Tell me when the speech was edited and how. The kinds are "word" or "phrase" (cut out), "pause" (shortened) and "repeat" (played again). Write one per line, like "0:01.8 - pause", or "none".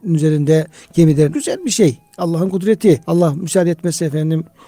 0:01.3 - phrase
0:03.0 - pause

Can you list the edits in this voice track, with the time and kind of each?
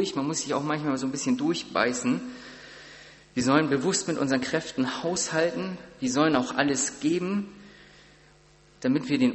none

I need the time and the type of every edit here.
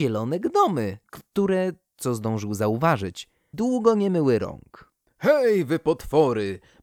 0:01.0 - pause
0:03.5 - word
0:05.1 - pause

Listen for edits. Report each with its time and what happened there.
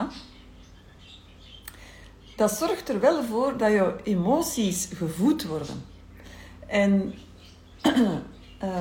none

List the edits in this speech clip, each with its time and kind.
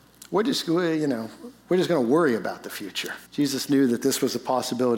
0:03.3 - pause

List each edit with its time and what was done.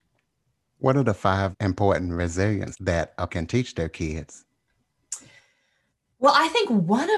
0:01.5 - word
0:02.7 - word
0:03.3 - word

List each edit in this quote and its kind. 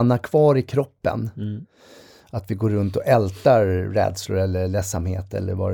none

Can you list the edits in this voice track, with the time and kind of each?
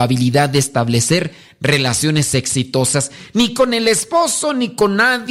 none

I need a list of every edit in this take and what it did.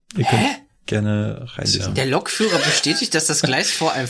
none

